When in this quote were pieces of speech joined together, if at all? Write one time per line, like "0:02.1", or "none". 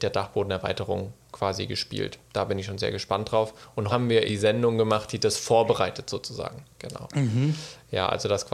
0:01.2
0:03.9
0:04.3
0:06.7